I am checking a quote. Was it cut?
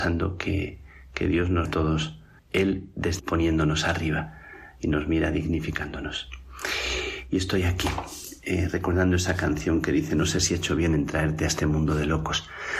yes; 3 cuts; at 1.7 s, 2.4 s, 3.2 s

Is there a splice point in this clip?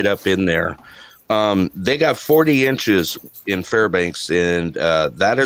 no; 0 cuts

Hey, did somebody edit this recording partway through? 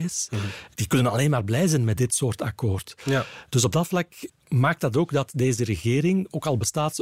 no; 0 cuts

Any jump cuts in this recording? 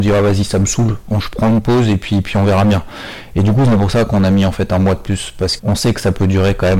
yes; 1 cut; at 5.6 s

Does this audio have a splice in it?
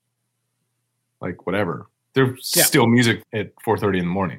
yes; 2 cuts; at 2.0 s, 3.2 s

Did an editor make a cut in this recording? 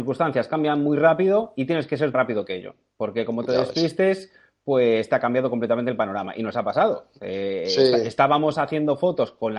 yes; 1 cut; at 2.1 s

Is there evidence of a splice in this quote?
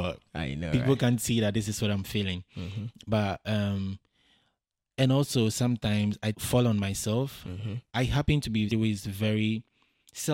yes; 2 cuts; at 6.3 s, 8.7 s

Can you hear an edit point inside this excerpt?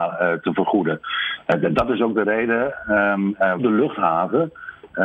yes; 1 cut; at 3.6 s

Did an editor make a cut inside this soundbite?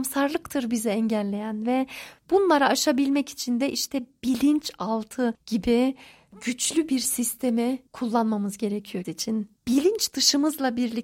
yes; 3 cuts; at 7.9 s, 9.0 s, 9.6 s

